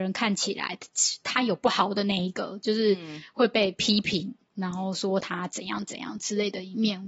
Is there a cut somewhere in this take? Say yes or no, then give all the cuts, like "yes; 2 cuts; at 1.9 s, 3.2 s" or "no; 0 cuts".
no; 0 cuts